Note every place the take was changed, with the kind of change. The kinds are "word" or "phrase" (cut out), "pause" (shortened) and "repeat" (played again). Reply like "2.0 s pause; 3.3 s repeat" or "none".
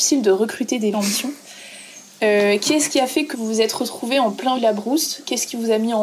0.9 s phrase; 3.3 s word; 4.6 s word